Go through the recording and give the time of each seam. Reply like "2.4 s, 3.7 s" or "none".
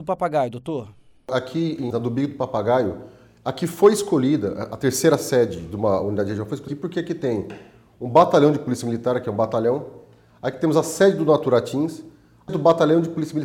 1.9 s, 6.7 s, 12.5 s